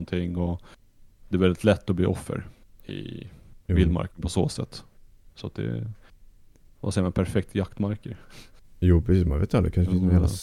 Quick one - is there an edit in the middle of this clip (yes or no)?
no